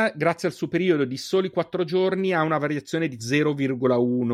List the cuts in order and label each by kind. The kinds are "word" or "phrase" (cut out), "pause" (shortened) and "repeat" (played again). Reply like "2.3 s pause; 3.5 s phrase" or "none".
3.2 s word